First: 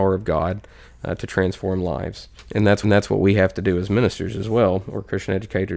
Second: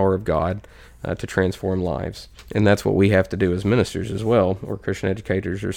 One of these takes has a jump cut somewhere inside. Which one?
first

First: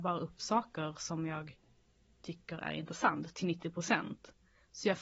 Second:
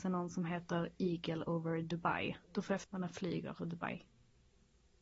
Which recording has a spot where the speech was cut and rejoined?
second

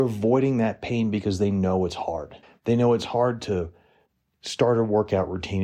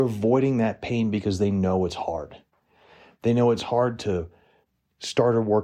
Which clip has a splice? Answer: first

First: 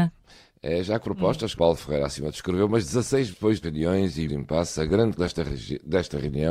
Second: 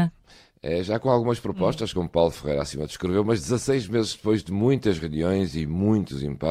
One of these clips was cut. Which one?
first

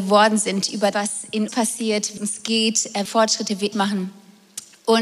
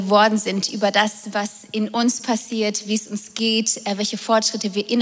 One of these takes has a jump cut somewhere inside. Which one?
first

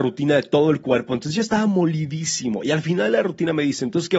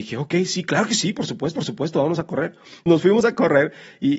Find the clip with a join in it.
second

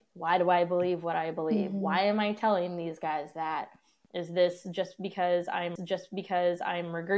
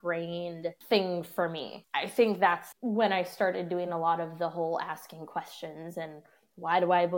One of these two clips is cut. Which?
first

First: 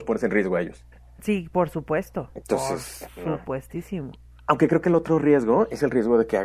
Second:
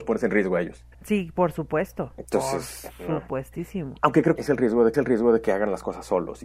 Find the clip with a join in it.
second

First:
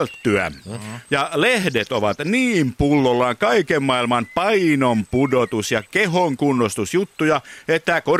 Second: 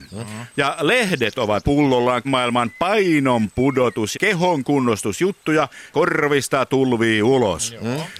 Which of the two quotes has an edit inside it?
second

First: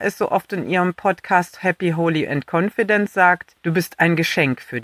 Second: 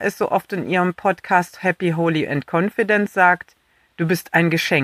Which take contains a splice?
first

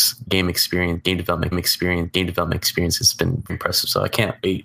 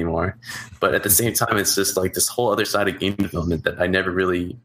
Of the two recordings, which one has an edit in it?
first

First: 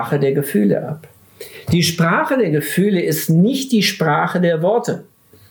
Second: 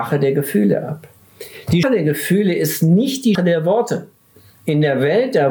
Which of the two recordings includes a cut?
second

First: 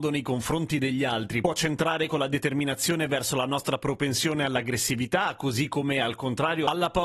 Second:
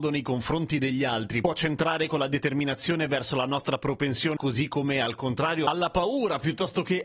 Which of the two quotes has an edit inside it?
second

